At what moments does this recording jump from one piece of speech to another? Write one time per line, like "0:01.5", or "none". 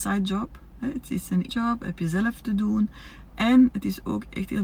0:01.5